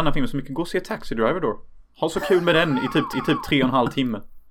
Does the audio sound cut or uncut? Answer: cut